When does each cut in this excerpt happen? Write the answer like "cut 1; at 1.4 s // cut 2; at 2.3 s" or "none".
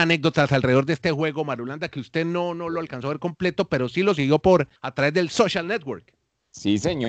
cut 1; at 4.8 s